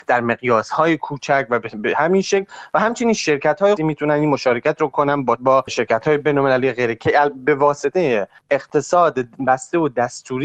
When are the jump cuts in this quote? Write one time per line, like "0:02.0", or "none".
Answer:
0:03.8
0:05.4
0:08.4